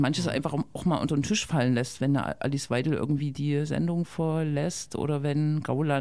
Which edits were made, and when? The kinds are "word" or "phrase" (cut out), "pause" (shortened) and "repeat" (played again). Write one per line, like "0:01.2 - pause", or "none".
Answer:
none